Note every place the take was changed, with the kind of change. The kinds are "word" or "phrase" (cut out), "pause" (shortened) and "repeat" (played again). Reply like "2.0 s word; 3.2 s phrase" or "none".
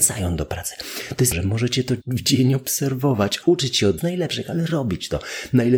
1.3 s word; 2.0 s word; 3.4 s word; 4.0 s word

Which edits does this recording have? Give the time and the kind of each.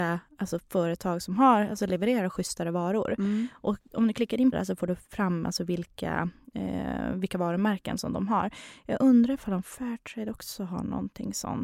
4.5 s phrase

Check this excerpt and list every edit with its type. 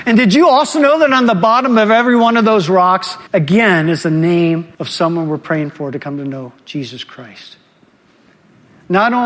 3.3 s pause; 4.7 s pause

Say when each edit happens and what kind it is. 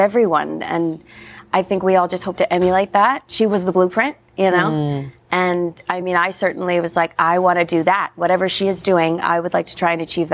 none

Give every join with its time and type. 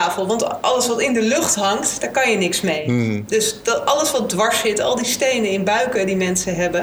none

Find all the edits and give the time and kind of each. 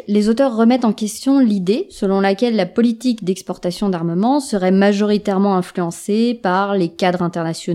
none

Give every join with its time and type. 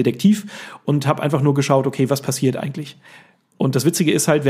none

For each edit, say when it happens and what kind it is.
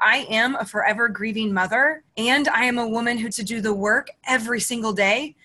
2.1 s pause; 3.3 s word

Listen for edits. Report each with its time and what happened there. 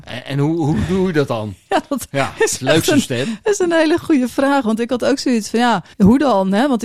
5.9 s pause

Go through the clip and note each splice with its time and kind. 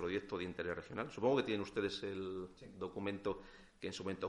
none

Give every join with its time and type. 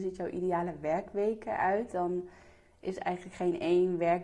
none

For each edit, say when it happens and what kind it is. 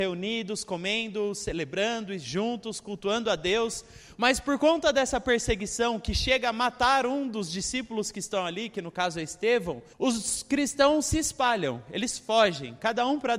9.9 s pause

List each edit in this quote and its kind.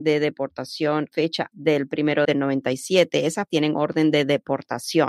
1.1 s word; 1.5 s word; 2.2 s word; 3.5 s word

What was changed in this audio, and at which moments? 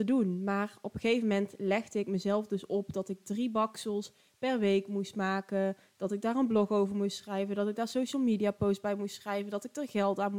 none

